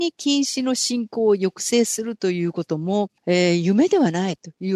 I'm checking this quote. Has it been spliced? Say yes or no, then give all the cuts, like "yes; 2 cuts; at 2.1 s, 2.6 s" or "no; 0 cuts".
yes; 1 cut; at 3.2 s